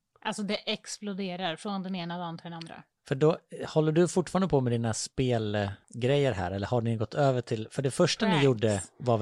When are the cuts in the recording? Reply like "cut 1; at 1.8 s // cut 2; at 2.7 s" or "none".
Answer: cut 1; at 5.8 s